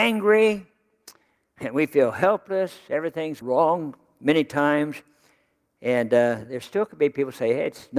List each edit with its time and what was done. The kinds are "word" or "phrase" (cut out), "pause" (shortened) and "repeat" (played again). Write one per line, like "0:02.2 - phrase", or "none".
0:03.4 - word